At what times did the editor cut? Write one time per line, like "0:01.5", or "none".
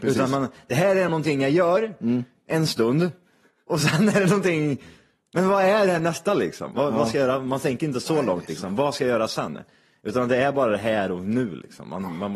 none